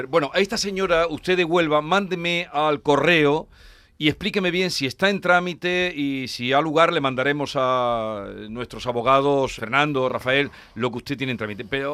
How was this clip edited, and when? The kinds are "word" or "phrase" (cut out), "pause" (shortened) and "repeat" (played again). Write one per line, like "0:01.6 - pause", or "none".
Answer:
0:09.6 - word